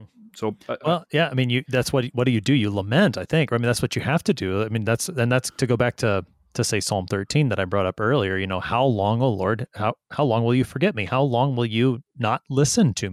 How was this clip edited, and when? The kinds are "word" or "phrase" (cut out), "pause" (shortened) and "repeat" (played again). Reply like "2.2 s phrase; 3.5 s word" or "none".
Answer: none